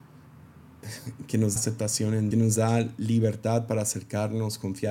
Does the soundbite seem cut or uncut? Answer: cut